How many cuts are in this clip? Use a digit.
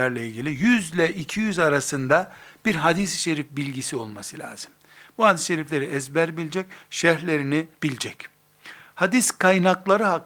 1